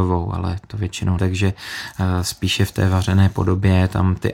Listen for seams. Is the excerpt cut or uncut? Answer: cut